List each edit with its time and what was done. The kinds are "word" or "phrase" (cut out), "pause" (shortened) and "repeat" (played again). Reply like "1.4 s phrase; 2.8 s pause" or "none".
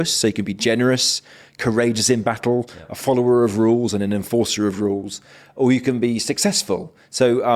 none